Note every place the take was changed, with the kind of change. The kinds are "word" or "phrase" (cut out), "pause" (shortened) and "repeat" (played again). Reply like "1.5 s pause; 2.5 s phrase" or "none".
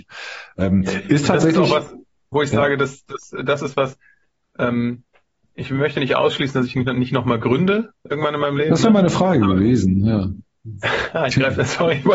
none